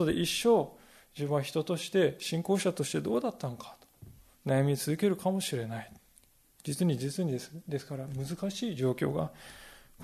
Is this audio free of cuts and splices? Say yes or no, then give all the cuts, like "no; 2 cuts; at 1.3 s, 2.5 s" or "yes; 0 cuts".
yes; 0 cuts